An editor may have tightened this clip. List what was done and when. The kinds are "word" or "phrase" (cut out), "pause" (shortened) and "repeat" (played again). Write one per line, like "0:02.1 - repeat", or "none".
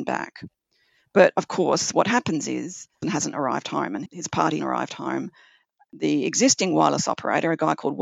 0:03.0 - word
0:04.1 - word
0:04.6 - word